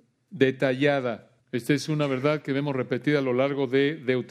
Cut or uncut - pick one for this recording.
cut